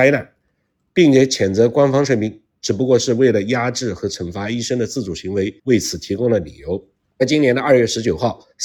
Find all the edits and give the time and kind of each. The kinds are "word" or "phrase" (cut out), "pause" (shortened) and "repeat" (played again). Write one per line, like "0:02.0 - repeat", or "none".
0:05.6 - pause
0:07.0 - pause